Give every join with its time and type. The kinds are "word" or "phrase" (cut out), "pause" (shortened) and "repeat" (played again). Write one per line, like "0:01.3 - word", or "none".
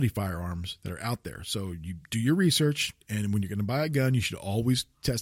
0:03.0 - pause